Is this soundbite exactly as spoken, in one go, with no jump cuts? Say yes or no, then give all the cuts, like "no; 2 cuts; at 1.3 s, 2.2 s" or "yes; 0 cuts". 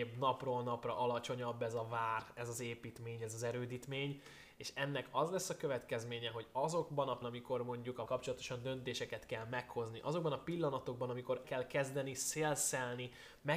no; 3 cuts; at 7.2 s, 8.1 s, 11.4 s